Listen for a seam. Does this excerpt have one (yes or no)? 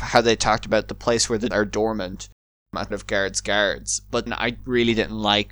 yes